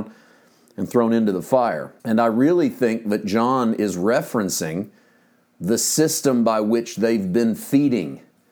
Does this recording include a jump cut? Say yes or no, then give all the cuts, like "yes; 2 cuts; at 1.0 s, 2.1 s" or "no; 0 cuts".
yes; 1 cut; at 2.0 s